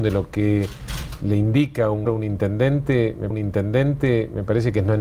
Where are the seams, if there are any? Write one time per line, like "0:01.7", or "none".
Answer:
0:02.1
0:03.3

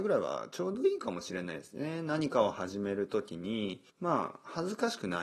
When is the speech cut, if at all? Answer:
0:03.9

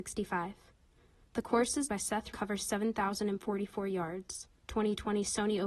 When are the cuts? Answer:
0:01.9
0:02.3
0:04.6

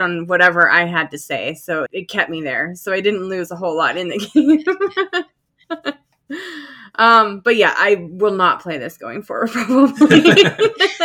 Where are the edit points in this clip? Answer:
0:01.9

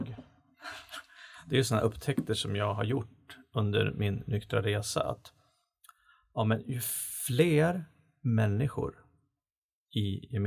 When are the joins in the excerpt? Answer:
none

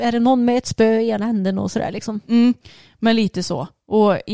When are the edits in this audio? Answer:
none

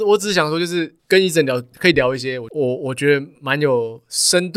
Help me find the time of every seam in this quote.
0:01.0
0:01.7

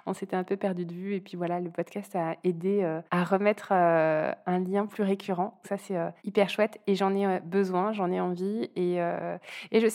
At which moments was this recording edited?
0:03.1
0:05.6
0:06.2

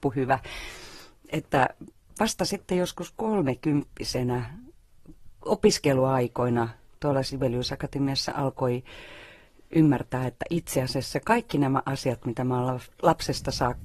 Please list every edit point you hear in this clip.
none

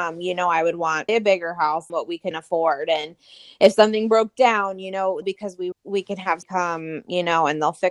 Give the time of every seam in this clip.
0:01.1
0:01.9
0:02.3
0:05.2
0:05.7
0:06.4

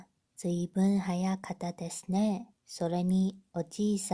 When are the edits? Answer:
0:02.6

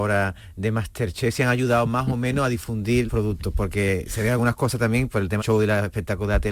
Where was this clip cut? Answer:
0:03.1
0:05.4

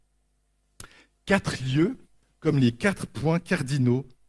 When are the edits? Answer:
none

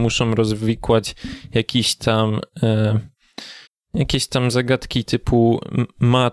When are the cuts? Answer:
0:03.7

